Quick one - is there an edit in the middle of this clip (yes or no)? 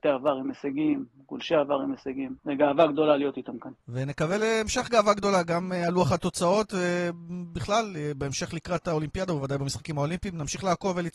yes